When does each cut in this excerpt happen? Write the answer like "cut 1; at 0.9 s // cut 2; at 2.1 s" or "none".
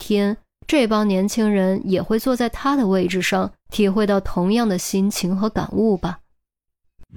cut 1; at 3.6 s